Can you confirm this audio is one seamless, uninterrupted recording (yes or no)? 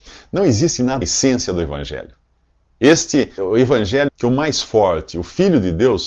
no